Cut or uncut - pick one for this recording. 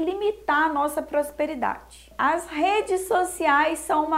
uncut